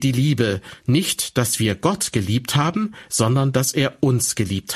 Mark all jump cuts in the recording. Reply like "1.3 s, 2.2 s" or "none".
none